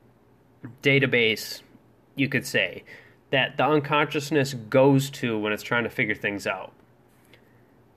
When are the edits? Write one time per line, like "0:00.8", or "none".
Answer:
none

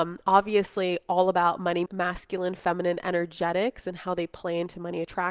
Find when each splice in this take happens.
0:01.9

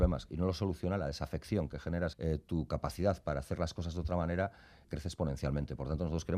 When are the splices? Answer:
0:02.1
0:04.8

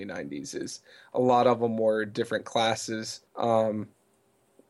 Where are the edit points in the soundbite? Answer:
0:03.3

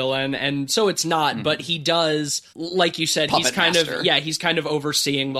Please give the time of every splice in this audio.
0:02.5

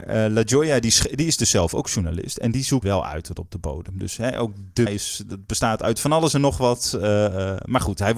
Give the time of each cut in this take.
0:02.8
0:04.9

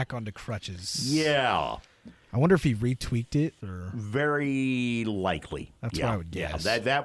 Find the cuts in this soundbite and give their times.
0:03.6

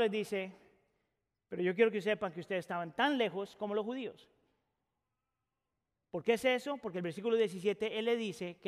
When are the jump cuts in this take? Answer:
none

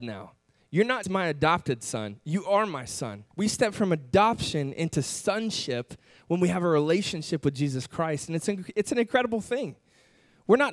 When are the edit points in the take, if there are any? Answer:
0:01.0
0:03.3

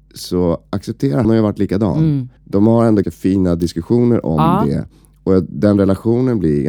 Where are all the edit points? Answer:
0:01.2
0:02.4
0:03.0

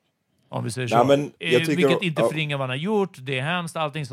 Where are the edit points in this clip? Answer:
0:01.4

